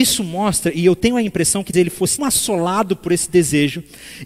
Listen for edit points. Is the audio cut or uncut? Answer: cut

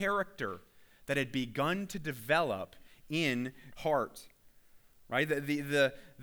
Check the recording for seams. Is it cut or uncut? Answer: cut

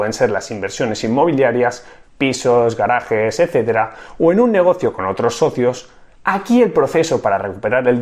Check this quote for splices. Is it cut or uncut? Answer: uncut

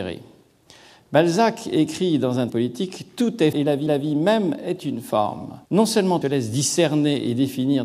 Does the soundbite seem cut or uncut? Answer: cut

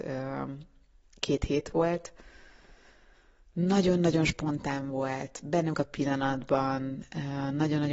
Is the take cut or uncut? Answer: cut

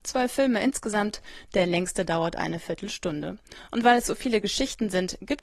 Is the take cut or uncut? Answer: uncut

